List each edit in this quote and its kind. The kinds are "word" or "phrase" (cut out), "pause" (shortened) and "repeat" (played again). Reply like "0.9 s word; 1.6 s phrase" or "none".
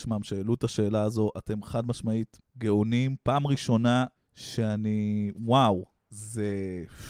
2.5 s pause; 4.2 s pause

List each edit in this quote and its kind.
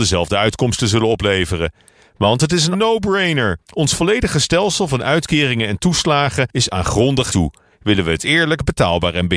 2.7 s word; 7.3 s word

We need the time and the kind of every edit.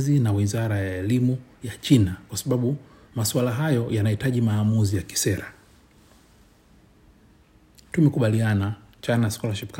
none

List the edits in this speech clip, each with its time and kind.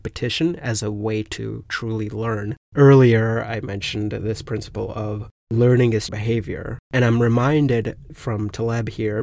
2.6 s pause; 6.1 s word; 6.8 s pause; 8.1 s phrase

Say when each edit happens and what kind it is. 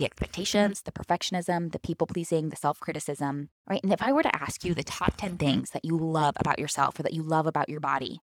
3.6 s pause

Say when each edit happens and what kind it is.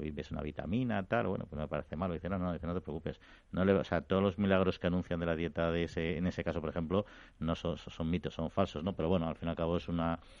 none

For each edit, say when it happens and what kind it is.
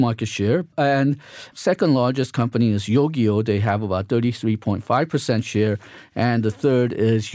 none

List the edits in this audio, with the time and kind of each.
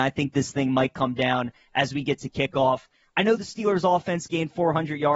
none

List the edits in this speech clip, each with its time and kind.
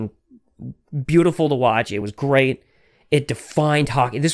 none

